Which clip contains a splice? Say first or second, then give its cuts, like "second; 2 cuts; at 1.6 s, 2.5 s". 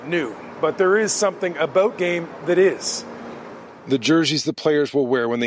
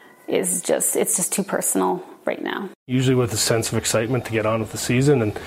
first; 1 cut; at 2.0 s